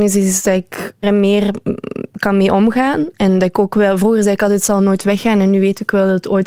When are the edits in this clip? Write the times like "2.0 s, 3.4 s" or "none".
1.0 s